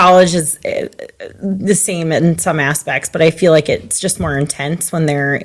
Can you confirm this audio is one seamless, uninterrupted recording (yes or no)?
yes